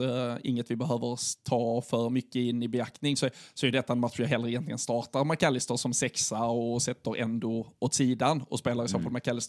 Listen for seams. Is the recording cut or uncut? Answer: uncut